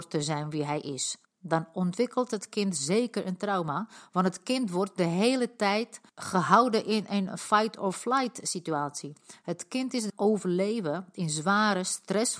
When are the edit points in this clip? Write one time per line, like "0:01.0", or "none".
0:01.2
0:06.1
0:10.1